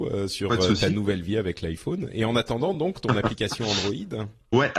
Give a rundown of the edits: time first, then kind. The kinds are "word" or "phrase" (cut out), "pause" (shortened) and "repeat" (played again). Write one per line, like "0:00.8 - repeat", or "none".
none